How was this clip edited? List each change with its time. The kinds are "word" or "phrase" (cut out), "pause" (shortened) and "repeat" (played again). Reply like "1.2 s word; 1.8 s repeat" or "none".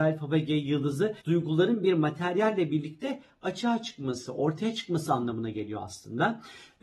1.2 s pause